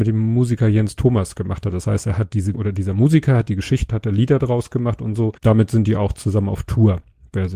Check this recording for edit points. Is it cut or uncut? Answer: cut